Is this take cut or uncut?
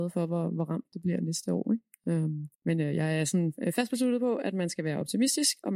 cut